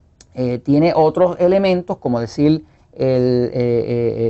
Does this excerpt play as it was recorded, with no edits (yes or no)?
yes